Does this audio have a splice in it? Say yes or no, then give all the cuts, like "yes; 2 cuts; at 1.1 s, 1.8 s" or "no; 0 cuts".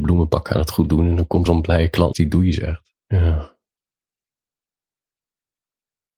yes; 3 cuts; at 1.5 s, 2.1 s, 3.0 s